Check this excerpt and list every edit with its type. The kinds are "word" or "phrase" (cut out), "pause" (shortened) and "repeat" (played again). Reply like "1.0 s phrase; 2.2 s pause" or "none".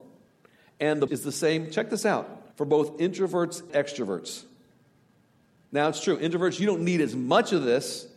1.1 s word; 2.5 s pause; 3.7 s word